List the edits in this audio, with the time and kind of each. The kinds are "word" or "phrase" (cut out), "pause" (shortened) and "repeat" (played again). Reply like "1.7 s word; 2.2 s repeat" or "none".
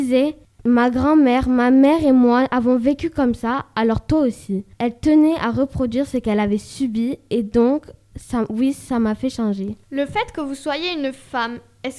4.7 s pause; 9.8 s pause